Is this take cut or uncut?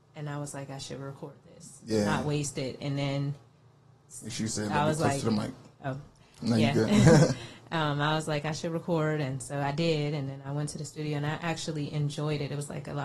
uncut